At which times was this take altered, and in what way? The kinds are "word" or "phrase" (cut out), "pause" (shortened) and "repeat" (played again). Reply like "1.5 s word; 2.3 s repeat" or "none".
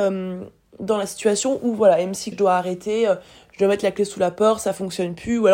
2.3 s word